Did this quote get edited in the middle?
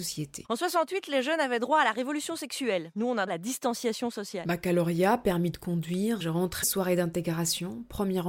yes; 3 cuts; at 3.3 s, 6.2 s, 6.6 s

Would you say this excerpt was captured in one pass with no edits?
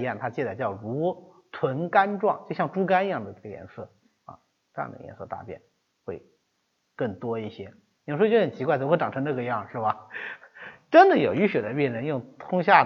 yes; 0 cuts

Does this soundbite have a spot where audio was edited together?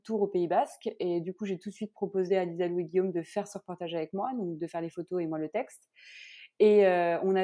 no; 0 cuts

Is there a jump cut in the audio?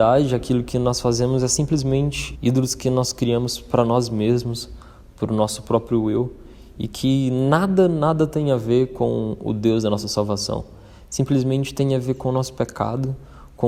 yes; 1 cut; at 2.4 s

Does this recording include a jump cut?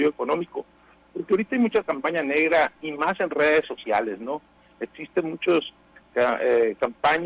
no; 0 cuts

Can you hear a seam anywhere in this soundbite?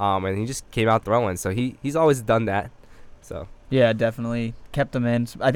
yes; 2 cuts; at 1.0 s, 3.6 s

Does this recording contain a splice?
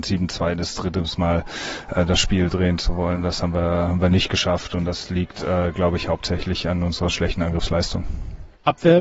no; 0 cuts

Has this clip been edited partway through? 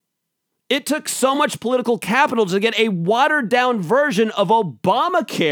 no; 0 cuts

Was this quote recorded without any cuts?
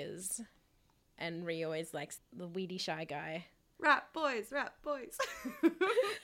no; 1 cut; at 2.2 s

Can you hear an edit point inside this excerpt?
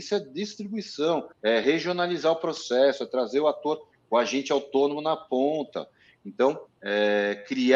yes; 2 cuts; at 1.3 s, 6.7 s

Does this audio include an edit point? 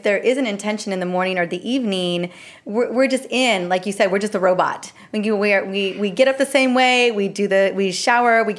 no; 0 cuts

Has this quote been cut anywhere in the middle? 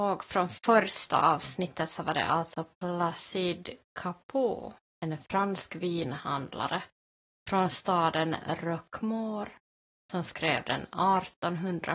no; 0 cuts

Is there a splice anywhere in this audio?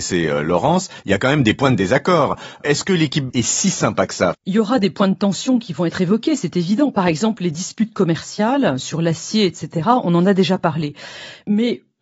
yes; 2 cuts; at 3.3 s, 4.3 s

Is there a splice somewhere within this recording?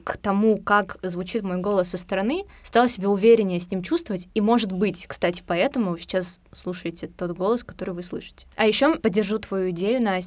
no; 0 cuts

